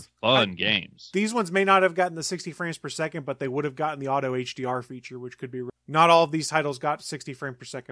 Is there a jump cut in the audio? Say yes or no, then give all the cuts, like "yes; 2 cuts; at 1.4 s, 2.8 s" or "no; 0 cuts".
no; 0 cuts